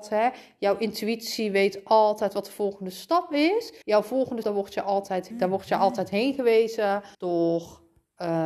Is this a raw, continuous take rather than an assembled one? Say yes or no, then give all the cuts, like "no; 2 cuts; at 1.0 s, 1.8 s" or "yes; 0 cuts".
no; 4 cuts; at 3.8 s, 4.4 s, 5.3 s, 7.1 s